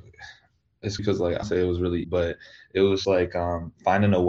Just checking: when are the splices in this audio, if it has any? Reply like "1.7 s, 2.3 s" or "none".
1.0 s, 1.4 s, 2.0 s, 3.0 s

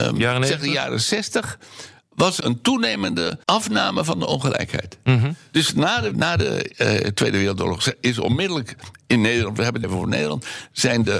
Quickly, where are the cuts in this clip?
2.4 s, 3.4 s, 6.1 s, 6.7 s, 9.8 s

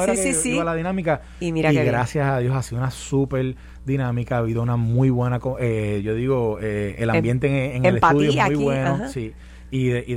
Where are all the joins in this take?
none

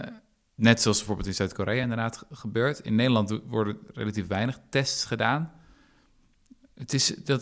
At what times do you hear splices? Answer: none

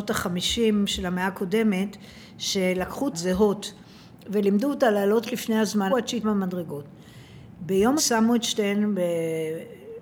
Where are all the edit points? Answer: 3.1 s, 5.2 s, 5.9 s, 6.2 s, 8.0 s

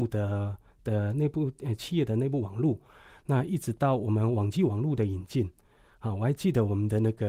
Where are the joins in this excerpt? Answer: none

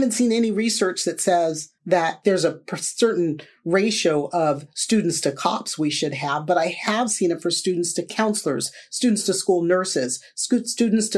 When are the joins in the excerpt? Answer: 1.8 s

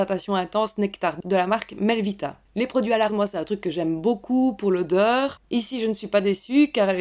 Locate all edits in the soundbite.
1.2 s, 3.1 s

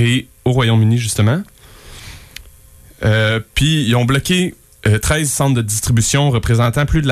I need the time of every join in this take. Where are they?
none

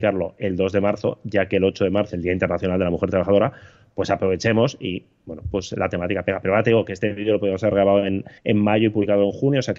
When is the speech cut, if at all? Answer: 2.1 s, 8.4 s

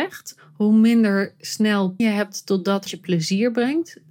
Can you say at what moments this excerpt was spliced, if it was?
2.0 s, 2.9 s

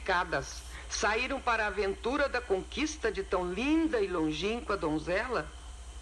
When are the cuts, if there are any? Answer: none

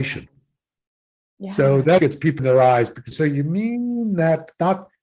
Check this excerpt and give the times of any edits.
2.0 s, 2.4 s, 3.1 s

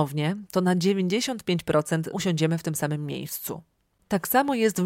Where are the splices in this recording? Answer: 2.1 s

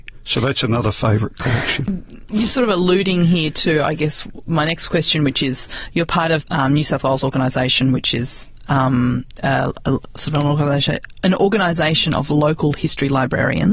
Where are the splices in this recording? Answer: 6.4 s

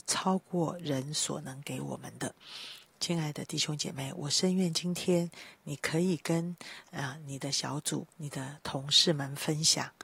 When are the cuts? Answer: 8.1 s

